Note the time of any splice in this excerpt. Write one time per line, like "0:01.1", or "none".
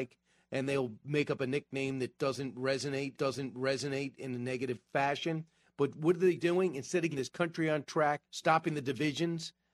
0:03.2
0:07.1
0:08.3